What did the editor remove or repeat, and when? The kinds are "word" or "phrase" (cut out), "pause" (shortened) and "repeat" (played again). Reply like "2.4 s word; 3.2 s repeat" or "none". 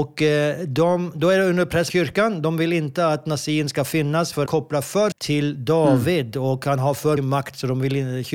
1.9 s word; 4.5 s word; 5.1 s word; 7.2 s word